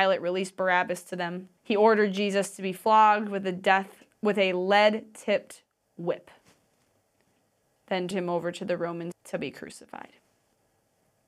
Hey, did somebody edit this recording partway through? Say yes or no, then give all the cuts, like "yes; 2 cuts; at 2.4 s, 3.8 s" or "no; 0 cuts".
yes; 3 cuts; at 1.6 s, 8.1 s, 9.1 s